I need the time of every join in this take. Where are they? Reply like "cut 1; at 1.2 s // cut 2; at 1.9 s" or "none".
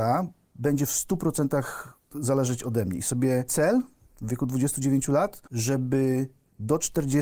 cut 1; at 3.5 s